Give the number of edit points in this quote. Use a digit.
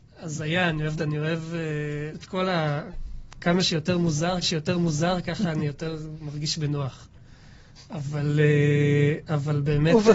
3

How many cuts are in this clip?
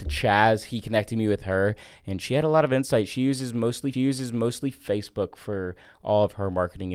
1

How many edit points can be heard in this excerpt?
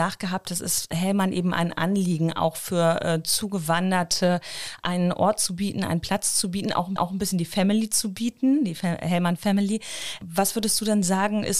1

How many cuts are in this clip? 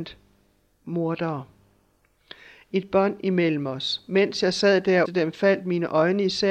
1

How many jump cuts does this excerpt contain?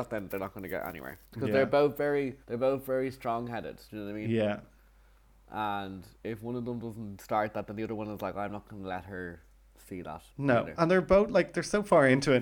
6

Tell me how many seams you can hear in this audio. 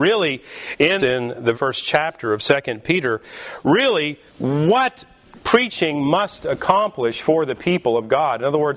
3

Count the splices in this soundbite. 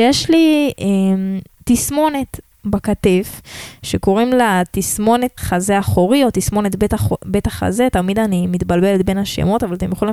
2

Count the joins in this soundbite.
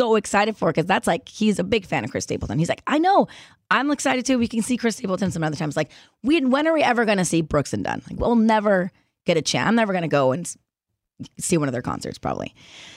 0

